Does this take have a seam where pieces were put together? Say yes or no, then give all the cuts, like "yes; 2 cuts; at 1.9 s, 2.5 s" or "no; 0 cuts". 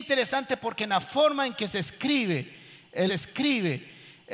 yes; 1 cut; at 3.1 s